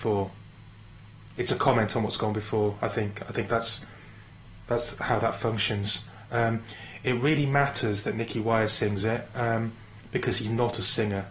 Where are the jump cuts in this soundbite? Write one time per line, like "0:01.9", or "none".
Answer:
none